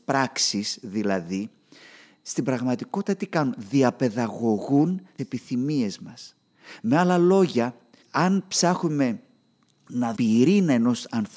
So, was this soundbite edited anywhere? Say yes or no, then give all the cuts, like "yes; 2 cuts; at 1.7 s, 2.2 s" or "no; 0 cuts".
yes; 3 cuts; at 5.2 s, 8.0 s, 10.2 s